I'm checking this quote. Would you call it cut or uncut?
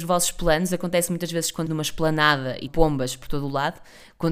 cut